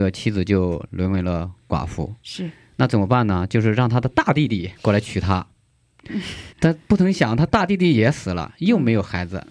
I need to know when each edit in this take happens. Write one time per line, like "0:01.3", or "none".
0:04.8
0:06.5